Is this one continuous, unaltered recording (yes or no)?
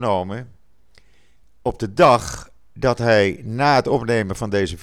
yes